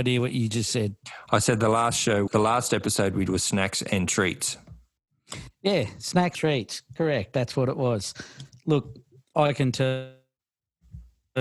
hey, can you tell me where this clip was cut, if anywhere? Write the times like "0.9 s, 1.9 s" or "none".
2.3 s, 3.3 s, 6.3 s